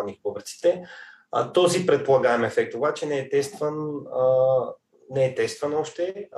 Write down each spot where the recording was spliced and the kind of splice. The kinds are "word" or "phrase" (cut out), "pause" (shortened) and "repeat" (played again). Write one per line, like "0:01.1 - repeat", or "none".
none

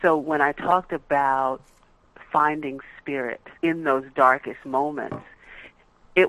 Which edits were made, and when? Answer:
0:03.6 - pause

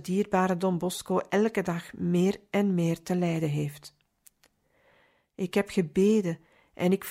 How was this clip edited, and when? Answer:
none

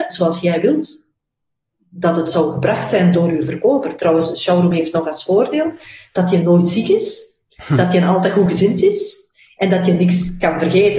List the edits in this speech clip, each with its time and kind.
none

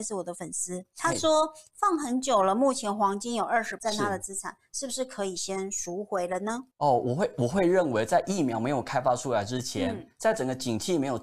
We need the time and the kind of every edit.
0:03.8 - phrase
0:06.7 - pause

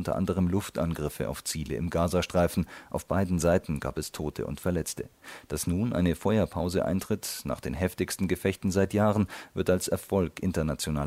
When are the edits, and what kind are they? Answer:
none

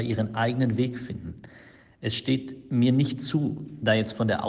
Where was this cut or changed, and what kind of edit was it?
none

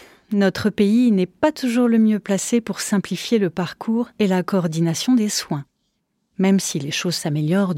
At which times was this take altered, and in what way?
none

